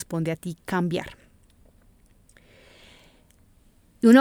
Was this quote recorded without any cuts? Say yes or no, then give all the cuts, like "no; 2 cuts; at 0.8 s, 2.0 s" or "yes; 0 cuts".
yes; 0 cuts